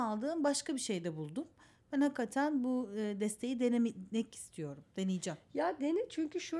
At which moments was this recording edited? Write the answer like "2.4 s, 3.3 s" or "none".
none